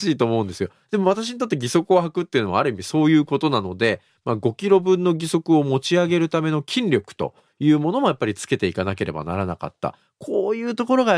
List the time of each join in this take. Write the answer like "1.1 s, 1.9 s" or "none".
none

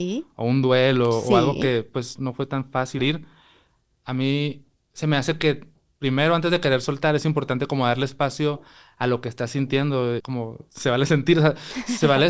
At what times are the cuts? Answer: 2.2 s, 3.0 s, 10.2 s

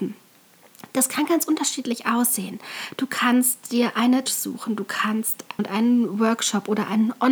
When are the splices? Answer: 4.3 s, 5.6 s

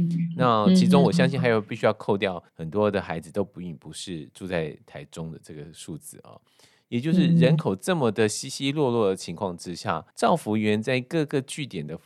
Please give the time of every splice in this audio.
2.5 s, 10.1 s

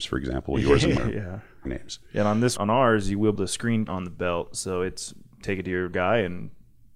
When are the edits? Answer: 1.0 s, 1.7 s, 2.6 s, 3.4 s, 3.9 s, 5.9 s

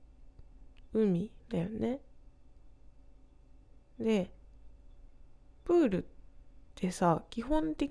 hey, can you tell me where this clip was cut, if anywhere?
1.4 s, 5.4 s, 6.7 s

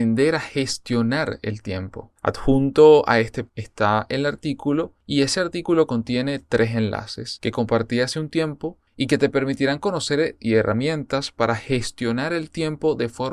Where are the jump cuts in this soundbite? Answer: 3.5 s, 10.4 s

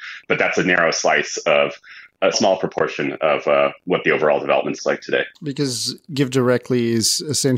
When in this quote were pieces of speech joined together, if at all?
2.3 s, 4.8 s, 5.4 s

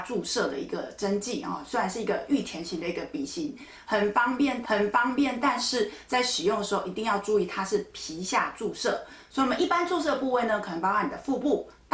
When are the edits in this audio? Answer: 4.6 s

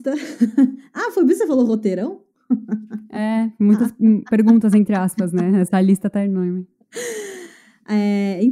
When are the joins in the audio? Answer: none

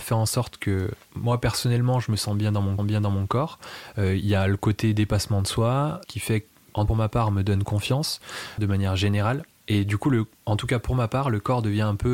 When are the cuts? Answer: 1.0 s, 2.8 s, 6.0 s, 6.9 s, 8.6 s, 10.3 s

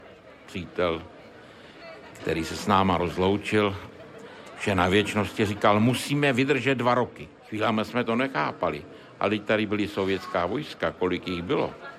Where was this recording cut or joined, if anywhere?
7.4 s

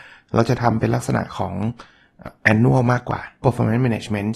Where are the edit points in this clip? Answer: 3.4 s

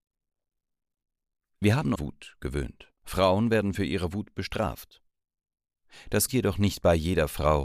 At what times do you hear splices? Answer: 1.9 s, 3.0 s, 6.3 s

